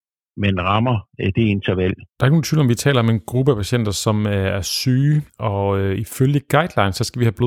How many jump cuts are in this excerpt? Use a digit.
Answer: 2